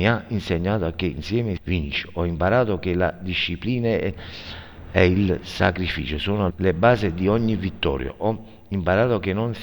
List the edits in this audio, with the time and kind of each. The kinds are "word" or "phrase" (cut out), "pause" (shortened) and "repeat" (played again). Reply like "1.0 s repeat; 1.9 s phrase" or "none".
1.6 s word; 6.5 s word